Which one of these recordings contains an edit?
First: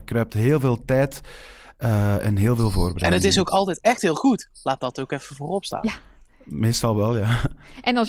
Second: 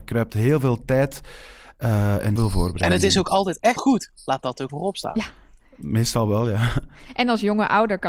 second; 3 cuts; at 2.4 s, 3.8 s, 4.7 s

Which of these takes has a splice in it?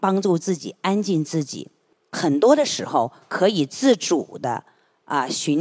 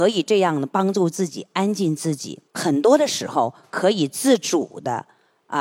second; 1 cut; at 2.5 s

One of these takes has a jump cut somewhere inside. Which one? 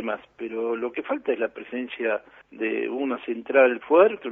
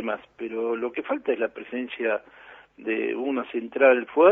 first; 1 cut; at 2.4 s

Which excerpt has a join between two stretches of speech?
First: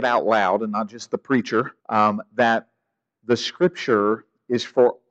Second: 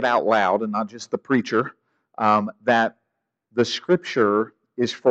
first; 1 cut; at 1.8 s

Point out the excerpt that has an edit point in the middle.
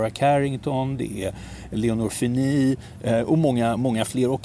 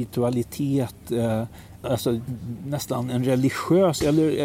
second; 1 cut; at 1.8 s

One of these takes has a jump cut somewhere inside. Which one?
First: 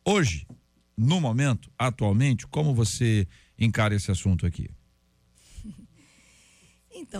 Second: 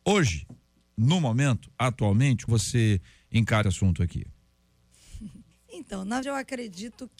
second; 4 cuts; at 2.5 s, 3.6 s, 5.5 s, 6.2 s

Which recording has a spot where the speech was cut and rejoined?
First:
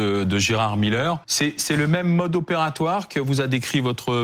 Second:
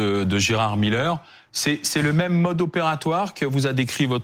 first; 1 cut; at 1.2 s

